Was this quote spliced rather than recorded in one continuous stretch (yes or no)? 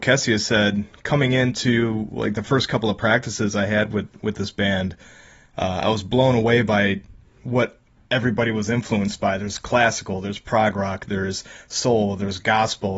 no